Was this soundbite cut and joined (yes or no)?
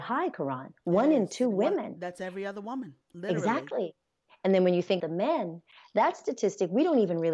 yes